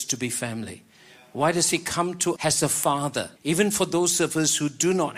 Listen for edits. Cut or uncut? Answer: cut